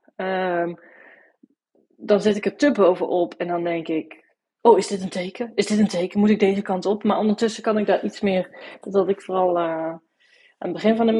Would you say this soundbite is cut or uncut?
uncut